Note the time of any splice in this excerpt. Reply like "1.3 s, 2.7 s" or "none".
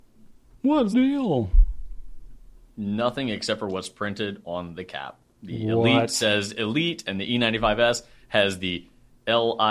0.9 s